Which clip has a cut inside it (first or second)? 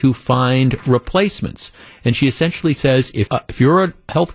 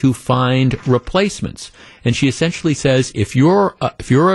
first